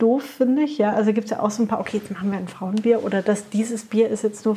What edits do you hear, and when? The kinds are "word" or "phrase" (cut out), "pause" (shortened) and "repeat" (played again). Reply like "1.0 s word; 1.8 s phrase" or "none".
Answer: none